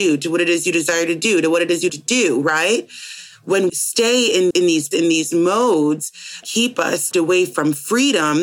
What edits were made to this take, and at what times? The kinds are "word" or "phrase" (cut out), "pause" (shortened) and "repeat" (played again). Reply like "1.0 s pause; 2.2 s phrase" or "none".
1.9 s word; 3.7 s word; 4.5 s word; 4.9 s word; 6.4 s word; 7.1 s word